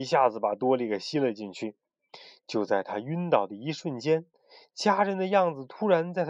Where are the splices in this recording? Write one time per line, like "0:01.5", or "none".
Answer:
none